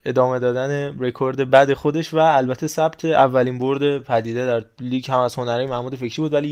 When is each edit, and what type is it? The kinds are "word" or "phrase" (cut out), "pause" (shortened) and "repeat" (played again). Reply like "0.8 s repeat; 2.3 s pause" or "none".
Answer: none